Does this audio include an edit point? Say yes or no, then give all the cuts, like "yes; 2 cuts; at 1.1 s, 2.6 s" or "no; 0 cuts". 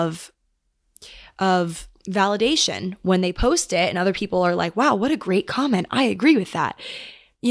no; 0 cuts